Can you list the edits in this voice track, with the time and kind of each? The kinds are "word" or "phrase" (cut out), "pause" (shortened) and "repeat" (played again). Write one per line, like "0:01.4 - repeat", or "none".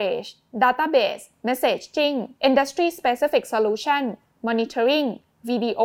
0:02.4 - pause